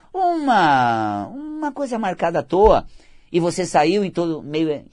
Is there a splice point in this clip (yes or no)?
no